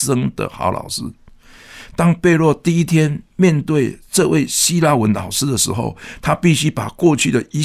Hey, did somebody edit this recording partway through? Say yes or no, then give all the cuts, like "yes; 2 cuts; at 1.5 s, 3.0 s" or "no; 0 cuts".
no; 0 cuts